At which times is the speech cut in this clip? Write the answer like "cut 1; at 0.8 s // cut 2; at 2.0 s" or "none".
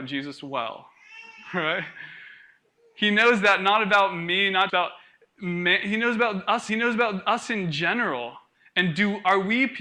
cut 1; at 4.7 s // cut 2; at 6.7 s